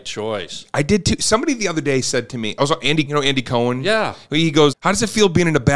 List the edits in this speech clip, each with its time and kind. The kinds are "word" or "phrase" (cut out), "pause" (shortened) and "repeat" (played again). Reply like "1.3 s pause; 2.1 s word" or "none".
3.1 s word; 4.7 s word